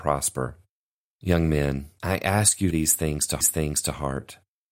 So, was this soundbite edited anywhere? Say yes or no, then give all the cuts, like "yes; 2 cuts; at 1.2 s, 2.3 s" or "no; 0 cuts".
yes; 3 cuts; at 2.0 s, 2.7 s, 3.4 s